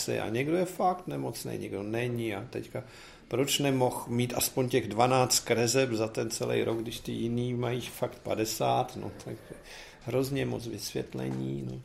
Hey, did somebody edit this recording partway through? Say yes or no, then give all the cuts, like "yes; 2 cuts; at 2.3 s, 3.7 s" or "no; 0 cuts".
no; 0 cuts